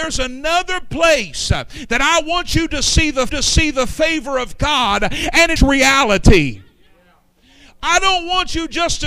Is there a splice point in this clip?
yes; 2 cuts; at 3.3 s, 5.6 s

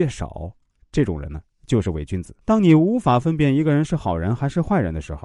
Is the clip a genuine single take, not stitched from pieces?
no; 1 cut; at 2.4 s

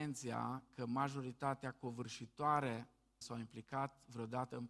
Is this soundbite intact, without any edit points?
no; 1 cut; at 3.2 s

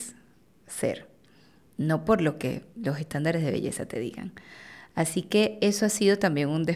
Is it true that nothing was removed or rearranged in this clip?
yes; 0 cuts

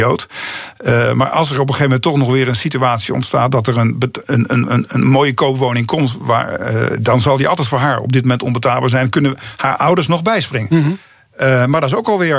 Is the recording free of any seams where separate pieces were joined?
yes; 0 cuts

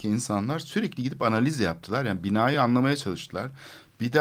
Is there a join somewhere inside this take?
no; 0 cuts

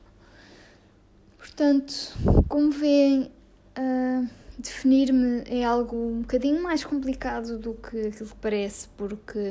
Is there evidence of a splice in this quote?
no; 0 cuts

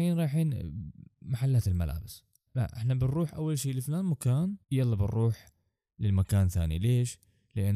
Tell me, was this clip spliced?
yes; 2 cuts; at 2.5 s, 4.6 s

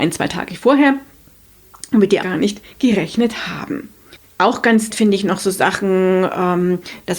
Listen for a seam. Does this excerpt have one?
yes; 2 cuts; at 2.2 s, 4.9 s

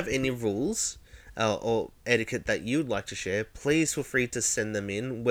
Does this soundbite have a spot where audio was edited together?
yes; 1 cut; at 2.0 s

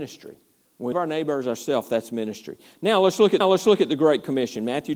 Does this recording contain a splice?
yes; 2 cuts; at 0.9 s, 3.4 s

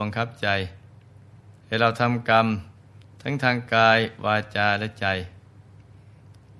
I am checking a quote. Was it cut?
yes; 1 cut; at 1.6 s

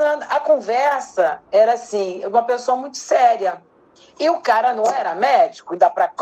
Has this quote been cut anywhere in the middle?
no; 0 cuts

